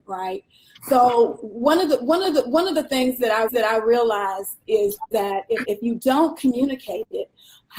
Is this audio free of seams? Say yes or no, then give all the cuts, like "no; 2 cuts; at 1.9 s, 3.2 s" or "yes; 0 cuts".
no; 3 cuts; at 2.2 s, 3.5 s, 5.6 s